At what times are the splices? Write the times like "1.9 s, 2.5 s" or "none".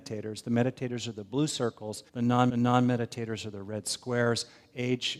2.1 s, 2.5 s